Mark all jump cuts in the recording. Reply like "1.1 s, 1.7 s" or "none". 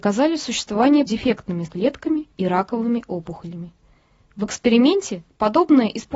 1.1 s, 1.7 s, 2.3 s